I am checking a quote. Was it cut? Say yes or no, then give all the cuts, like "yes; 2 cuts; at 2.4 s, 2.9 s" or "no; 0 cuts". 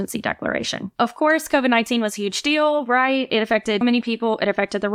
yes; 1 cut; at 3.8 s